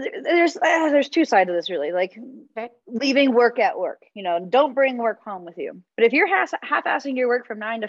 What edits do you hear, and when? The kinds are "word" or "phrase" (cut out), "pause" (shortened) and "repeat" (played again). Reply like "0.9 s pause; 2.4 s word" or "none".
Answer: 5.9 s pause